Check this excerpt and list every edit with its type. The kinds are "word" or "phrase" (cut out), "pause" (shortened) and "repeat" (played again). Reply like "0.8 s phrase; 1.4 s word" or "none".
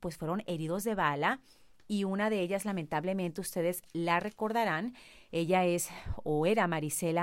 none

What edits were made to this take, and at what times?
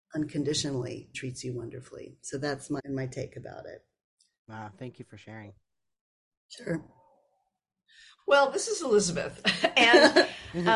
1.1 s word; 2.8 s word

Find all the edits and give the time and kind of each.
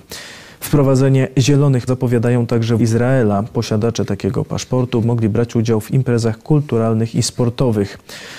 1.9 s word; 2.8 s word; 5.0 s word

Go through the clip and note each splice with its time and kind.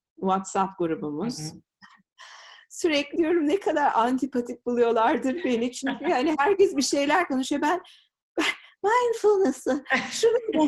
3.2 s word

